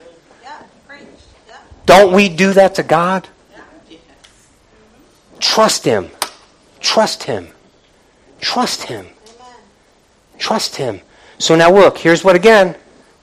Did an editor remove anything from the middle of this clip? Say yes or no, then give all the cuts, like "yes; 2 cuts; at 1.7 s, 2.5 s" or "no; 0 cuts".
no; 0 cuts